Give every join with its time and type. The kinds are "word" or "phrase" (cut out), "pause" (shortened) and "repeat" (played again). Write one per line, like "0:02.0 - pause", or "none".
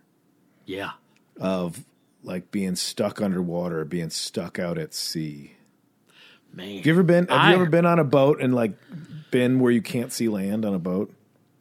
none